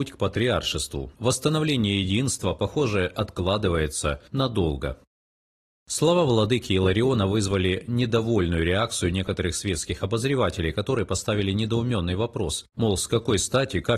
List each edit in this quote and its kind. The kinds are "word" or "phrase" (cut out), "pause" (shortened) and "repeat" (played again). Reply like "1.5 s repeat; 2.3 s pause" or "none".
1.1 s pause; 4.3 s pause; 12.7 s pause